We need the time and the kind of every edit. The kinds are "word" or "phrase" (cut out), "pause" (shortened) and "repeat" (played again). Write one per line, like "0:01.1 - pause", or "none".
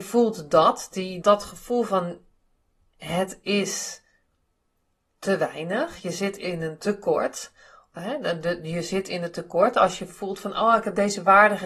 0:01.2 - word